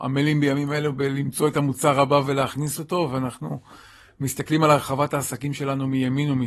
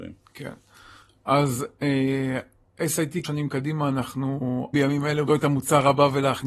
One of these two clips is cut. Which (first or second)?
second